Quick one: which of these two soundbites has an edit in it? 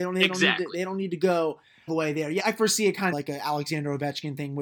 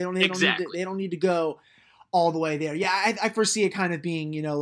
first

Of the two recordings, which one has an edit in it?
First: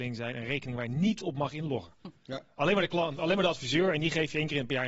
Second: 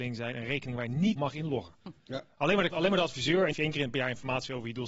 second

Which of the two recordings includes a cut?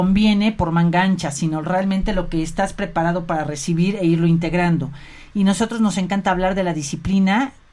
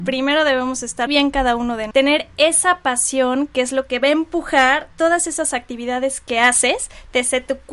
second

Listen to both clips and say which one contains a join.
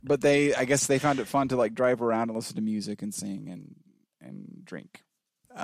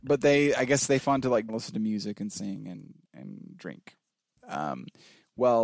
second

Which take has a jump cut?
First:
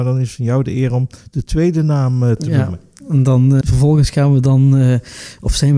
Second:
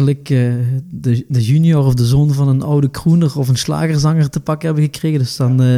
first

